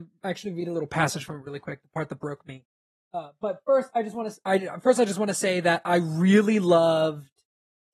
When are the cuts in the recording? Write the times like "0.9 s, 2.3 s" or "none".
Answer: none